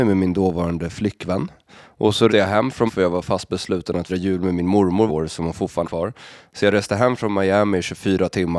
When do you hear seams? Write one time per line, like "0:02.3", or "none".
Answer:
0:02.3
0:02.9
0:04.1
0:05.1
0:05.8